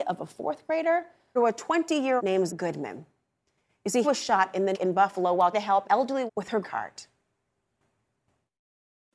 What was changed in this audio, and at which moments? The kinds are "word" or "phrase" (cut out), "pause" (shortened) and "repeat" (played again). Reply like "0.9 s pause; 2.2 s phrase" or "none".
1.4 s word; 2.2 s word; 2.5 s word; 4.0 s word; 4.7 s word; 5.5 s word; 5.8 s word; 6.3 s word; 6.6 s word